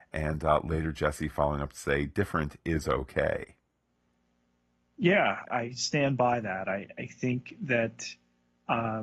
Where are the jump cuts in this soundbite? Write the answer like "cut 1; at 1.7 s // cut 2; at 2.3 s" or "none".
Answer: cut 1; at 5.4 s